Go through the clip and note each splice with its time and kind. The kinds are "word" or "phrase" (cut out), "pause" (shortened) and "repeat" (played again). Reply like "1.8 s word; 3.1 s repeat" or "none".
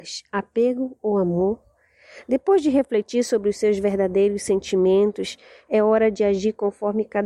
none